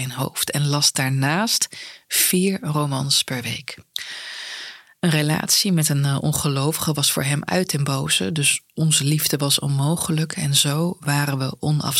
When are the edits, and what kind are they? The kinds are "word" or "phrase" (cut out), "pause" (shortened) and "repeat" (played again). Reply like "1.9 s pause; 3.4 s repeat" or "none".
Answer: none